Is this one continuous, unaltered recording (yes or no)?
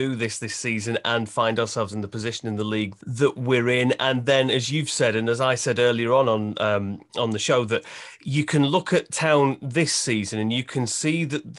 no